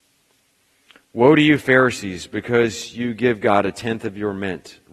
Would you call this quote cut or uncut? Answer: uncut